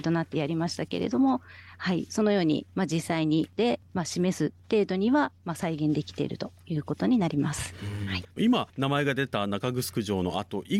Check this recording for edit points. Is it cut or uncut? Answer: cut